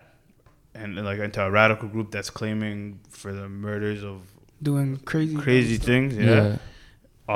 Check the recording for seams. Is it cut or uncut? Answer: uncut